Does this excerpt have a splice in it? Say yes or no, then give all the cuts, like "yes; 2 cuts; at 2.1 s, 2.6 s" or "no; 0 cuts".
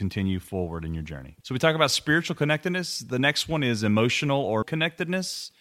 yes; 2 cuts; at 1.4 s, 4.6 s